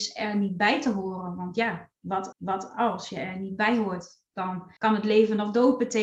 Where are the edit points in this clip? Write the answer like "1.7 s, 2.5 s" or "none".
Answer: 2.3 s, 4.8 s